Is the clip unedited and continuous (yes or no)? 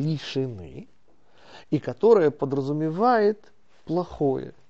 yes